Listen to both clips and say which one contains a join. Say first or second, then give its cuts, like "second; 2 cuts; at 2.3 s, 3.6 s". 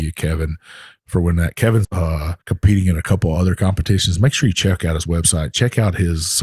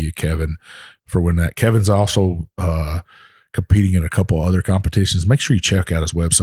first; 2 cuts; at 1.8 s, 2.4 s